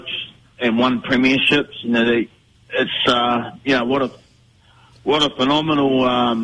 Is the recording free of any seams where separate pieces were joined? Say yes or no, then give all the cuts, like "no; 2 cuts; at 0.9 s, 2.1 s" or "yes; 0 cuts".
yes; 0 cuts